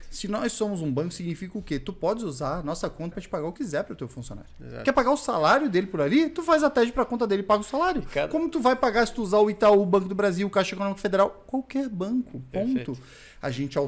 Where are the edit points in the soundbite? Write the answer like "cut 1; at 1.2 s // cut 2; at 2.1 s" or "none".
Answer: cut 1; at 3.1 s // cut 2; at 3.6 s